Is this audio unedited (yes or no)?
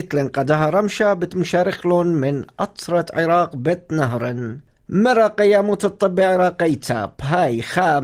yes